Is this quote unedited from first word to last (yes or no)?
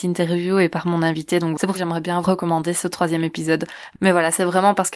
no